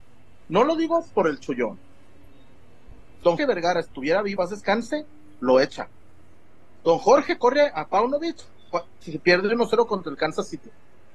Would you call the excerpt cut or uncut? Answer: cut